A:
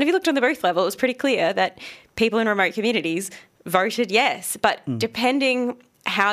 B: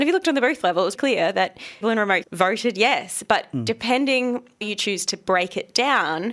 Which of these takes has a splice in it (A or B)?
B